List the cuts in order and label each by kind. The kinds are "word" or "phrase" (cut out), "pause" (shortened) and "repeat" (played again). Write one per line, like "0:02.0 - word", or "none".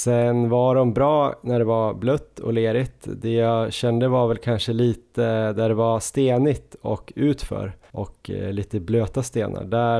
none